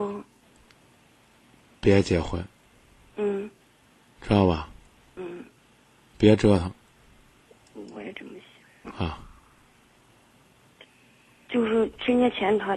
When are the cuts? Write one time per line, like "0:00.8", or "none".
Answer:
none